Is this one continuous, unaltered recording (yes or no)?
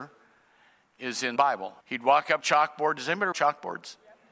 no